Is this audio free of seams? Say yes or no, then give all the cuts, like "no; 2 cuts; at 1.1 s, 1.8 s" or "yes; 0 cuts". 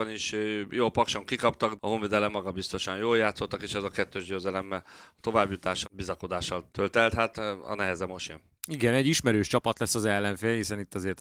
no; 3 cuts; at 1.8 s, 5.8 s, 6.7 s